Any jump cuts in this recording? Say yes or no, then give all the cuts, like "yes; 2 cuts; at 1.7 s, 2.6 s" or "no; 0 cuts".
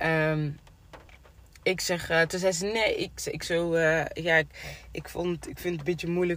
no; 0 cuts